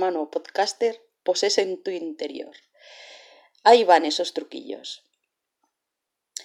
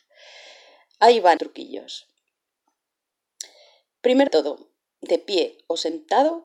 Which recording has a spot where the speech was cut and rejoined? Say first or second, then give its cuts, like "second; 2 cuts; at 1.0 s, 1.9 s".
second; 2 cuts; at 1.4 s, 4.3 s